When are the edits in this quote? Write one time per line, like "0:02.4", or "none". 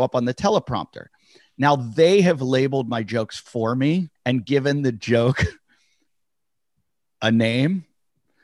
0:04.2